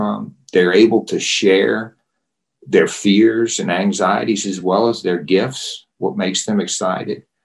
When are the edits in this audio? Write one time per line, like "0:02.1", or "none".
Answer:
none